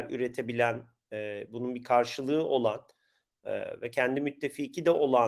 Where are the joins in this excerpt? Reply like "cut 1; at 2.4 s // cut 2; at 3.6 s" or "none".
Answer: none